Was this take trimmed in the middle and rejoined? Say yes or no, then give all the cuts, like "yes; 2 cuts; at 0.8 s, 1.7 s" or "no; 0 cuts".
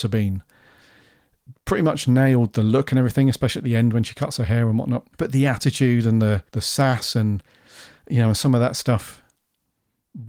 yes; 2 cuts; at 5.1 s, 6.5 s